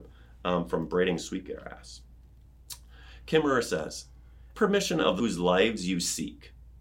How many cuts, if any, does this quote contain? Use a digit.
2